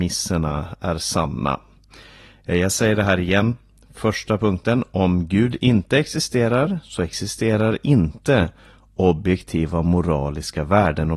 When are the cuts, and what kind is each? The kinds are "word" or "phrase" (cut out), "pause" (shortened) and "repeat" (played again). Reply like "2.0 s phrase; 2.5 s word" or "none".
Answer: none